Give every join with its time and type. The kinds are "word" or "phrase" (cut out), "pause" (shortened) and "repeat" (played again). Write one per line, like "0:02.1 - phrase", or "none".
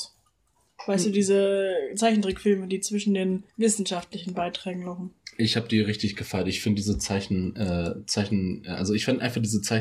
0:03.5 - pause